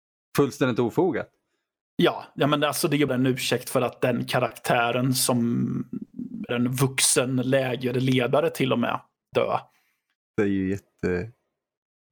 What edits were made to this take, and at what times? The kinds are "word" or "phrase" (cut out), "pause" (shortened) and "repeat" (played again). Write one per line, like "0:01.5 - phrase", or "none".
0:03.1 - word
0:06.5 - word
0:09.3 - word